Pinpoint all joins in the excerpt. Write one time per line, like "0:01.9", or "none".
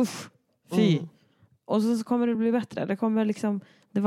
none

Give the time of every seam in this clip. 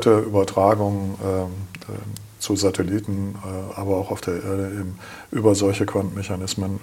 none

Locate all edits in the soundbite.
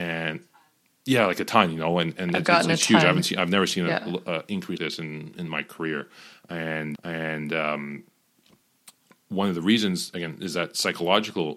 0:04.8
0:06.9

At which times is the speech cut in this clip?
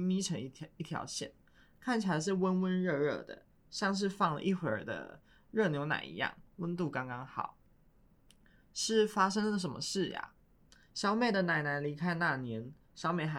none

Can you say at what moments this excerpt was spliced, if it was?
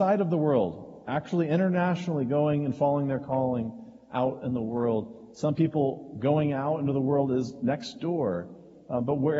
none

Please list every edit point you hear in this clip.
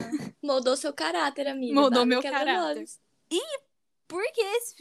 none

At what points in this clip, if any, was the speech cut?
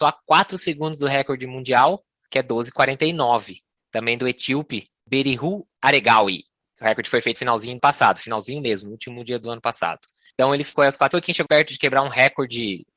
0:07.4
0:07.8
0:11.1
0:11.5

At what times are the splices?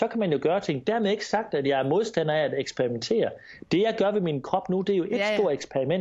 none

